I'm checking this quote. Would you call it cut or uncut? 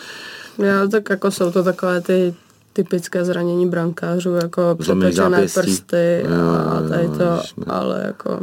uncut